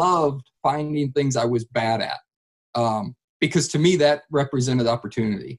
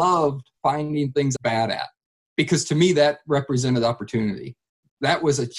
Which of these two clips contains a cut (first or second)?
second